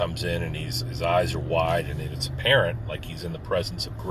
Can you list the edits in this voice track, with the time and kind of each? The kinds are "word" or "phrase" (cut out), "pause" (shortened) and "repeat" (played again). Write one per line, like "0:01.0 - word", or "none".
none